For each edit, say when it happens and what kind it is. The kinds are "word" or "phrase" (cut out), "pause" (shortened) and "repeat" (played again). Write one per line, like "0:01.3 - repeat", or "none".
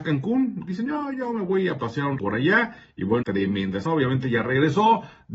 0:02.2 - word
0:03.2 - phrase
0:03.9 - word